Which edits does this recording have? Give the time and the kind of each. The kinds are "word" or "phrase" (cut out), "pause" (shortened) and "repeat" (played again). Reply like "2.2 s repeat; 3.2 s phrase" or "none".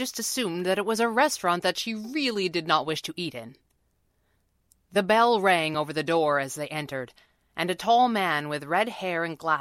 none